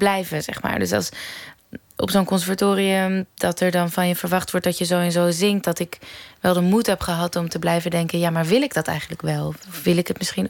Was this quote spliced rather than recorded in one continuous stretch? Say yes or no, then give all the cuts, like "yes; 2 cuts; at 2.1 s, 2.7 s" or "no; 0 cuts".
no; 0 cuts